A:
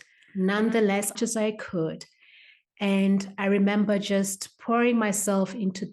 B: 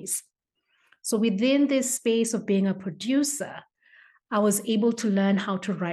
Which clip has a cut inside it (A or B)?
A